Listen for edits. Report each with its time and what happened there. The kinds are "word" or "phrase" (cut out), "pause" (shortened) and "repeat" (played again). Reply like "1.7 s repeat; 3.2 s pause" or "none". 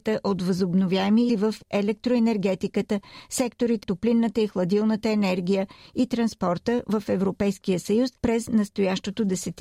1.3 s word; 3.8 s word; 8.2 s pause